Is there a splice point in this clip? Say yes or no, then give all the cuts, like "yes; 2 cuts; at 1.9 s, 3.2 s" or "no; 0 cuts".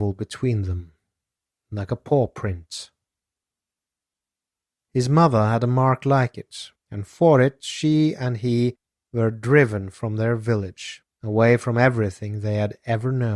yes; 1 cut; at 6.8 s